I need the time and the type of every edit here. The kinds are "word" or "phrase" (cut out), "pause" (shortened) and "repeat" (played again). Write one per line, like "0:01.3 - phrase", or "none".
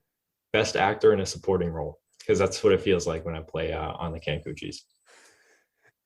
0:02.1 - pause